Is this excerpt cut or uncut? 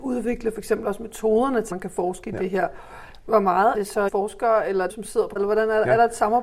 cut